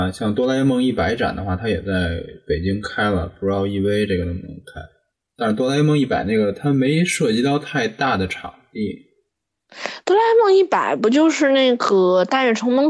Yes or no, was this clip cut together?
no